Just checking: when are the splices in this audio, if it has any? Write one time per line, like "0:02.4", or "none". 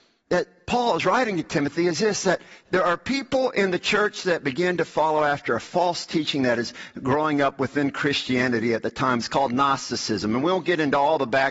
none